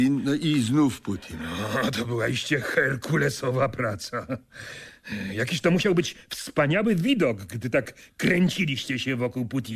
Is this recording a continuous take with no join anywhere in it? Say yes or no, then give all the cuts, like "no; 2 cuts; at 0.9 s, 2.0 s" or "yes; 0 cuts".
yes; 0 cuts